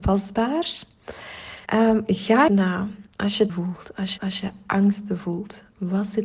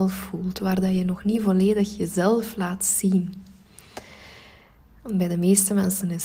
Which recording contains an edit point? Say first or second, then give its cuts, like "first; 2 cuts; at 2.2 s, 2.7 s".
first; 5 cuts; at 1.7 s, 2.5 s, 3.1 s, 3.5 s, 4.2 s